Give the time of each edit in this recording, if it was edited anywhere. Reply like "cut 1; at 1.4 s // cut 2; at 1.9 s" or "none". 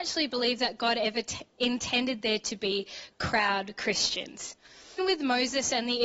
cut 1; at 5.0 s

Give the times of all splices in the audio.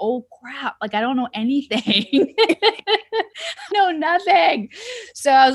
cut 1; at 3.7 s

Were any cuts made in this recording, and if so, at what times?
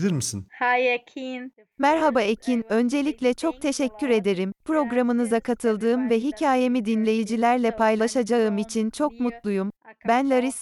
none

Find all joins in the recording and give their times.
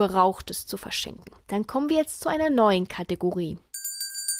none

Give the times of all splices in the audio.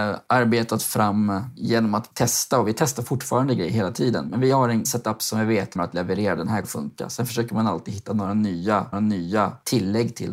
cut 1; at 5.8 s // cut 2; at 6.6 s // cut 3; at 8.9 s

